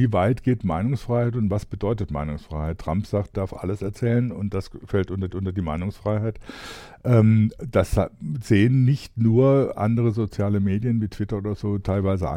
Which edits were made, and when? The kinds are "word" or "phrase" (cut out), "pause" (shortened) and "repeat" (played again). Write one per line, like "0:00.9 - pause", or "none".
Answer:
0:03.3 - word
0:05.3 - repeat